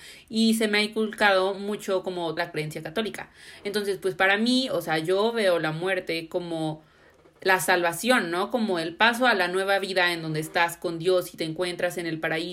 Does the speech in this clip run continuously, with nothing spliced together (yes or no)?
no